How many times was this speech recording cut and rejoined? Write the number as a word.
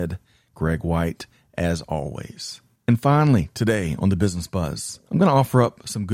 zero